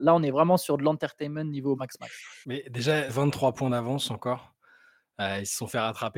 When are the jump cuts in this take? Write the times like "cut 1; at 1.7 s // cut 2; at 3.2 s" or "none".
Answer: cut 1; at 1.8 s // cut 2; at 2.4 s // cut 3; at 3.1 s